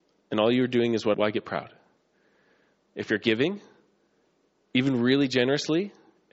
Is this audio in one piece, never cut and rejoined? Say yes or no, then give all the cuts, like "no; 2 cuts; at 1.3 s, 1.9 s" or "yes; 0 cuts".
no; 1 cut; at 1.1 s